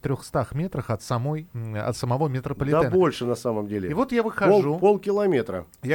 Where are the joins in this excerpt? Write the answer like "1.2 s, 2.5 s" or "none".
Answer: none